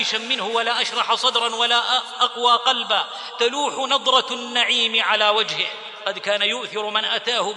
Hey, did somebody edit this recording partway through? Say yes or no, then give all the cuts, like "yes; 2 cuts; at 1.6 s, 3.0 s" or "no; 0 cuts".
no; 0 cuts